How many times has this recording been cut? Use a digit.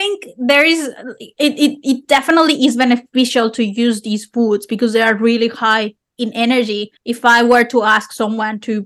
1